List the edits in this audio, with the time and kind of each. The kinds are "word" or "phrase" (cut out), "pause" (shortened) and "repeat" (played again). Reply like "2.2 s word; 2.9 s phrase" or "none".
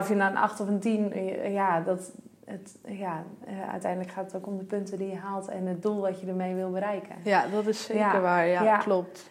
none